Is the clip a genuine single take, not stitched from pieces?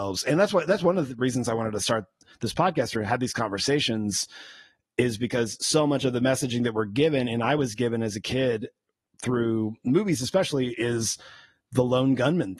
yes; 0 cuts

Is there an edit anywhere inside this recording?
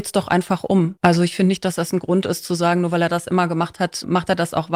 yes; 1 cut; at 1.0 s

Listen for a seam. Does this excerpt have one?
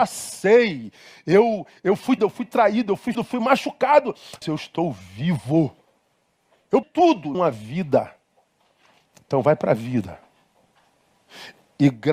yes; 5 cuts; at 2.2 s, 3.1 s, 4.4 s, 6.8 s, 7.3 s

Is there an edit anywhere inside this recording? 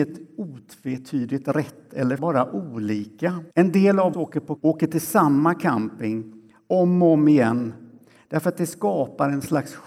yes; 4 cuts; at 2.2 s, 3.5 s, 4.1 s, 4.6 s

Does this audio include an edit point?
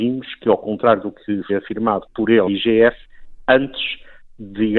yes; 2 cuts; at 1.5 s, 2.5 s

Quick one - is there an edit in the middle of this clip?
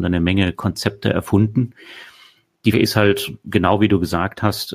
yes; 1 cut; at 2.7 s

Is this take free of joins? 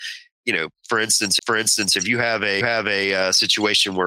no; 2 cuts; at 1.4 s, 2.6 s

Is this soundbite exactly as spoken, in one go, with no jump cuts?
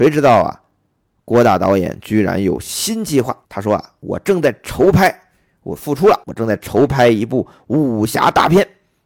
no; 2 cuts; at 3.4 s, 6.2 s

